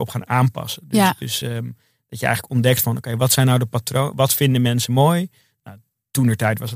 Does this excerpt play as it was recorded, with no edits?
yes; 0 cuts

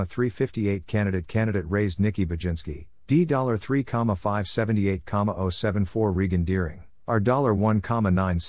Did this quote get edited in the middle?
no; 0 cuts

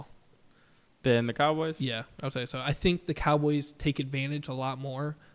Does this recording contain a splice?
no; 0 cuts

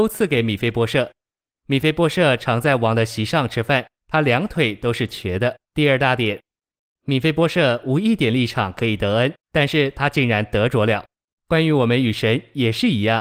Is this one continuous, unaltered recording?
no; 3 cuts; at 4.0 s, 5.6 s, 9.4 s

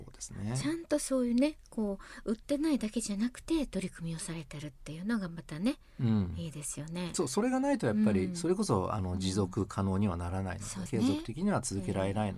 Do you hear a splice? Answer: yes; 1 cut; at 10.9 s

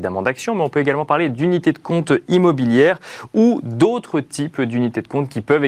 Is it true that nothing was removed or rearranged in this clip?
yes; 0 cuts

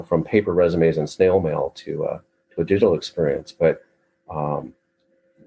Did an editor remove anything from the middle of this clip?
no; 0 cuts

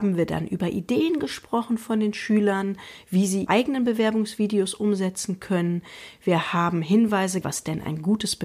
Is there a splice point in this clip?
yes; 2 cuts; at 3.5 s, 7.4 s

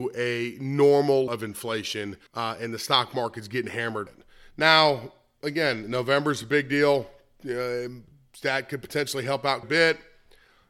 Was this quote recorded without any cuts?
no; 4 cuts; at 1.3 s, 2.3 s, 4.1 s, 9.6 s

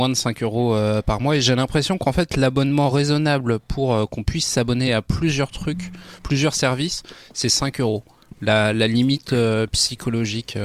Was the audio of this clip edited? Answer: no; 0 cuts

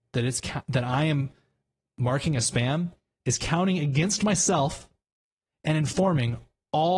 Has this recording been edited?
no; 0 cuts

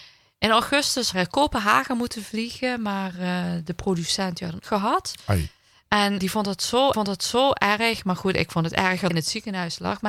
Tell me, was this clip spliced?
yes; 5 cuts; at 1.1 s, 4.6 s, 6.2 s, 6.9 s, 9.1 s

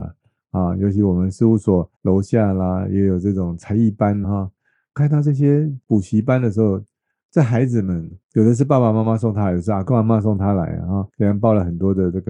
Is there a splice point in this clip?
yes; 5 cuts; at 1.9 s, 4.2 s, 5.8 s, 8.2 s, 11.1 s

